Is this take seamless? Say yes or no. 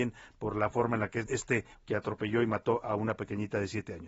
no